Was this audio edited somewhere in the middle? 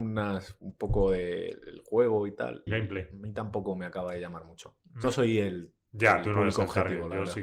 yes; 2 cuts; at 2.7 s, 5.0 s

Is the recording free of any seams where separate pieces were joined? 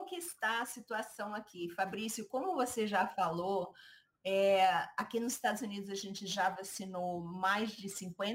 yes; 0 cuts

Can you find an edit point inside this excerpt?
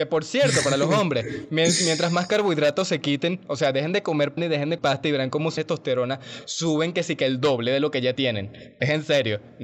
yes; 3 cuts; at 4.4 s, 4.8 s, 5.6 s

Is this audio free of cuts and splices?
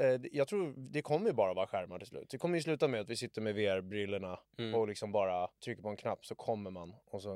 no; 2 cuts; at 4.4 s, 5.6 s

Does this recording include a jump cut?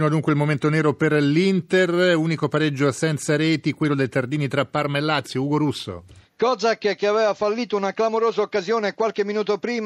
no; 0 cuts

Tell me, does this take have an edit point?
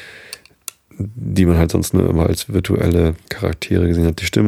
yes; 1 cut; at 3.2 s

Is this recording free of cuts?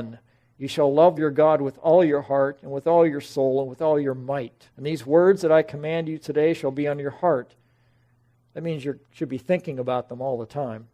no; 3 cuts; at 1.2 s, 4.7 s, 9.0 s

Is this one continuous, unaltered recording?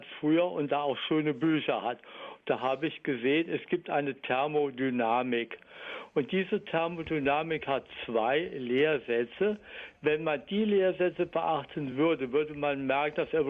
yes; 0 cuts

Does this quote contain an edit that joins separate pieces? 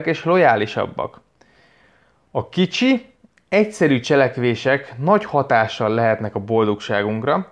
no; 0 cuts

